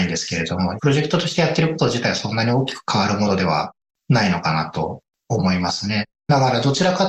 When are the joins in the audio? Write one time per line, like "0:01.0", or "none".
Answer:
none